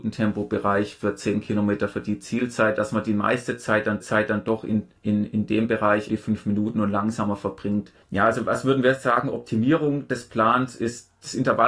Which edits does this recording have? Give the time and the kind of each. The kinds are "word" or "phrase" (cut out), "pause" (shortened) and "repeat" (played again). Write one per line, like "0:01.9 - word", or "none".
0:04.0 - repeat
0:05.0 - pause
0:06.1 - word
0:08.0 - pause